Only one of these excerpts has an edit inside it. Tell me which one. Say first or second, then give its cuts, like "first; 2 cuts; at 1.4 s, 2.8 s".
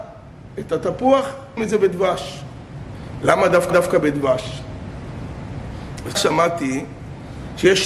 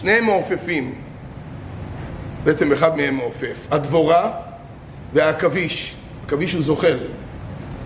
first; 3 cuts; at 1.6 s, 3.7 s, 6.1 s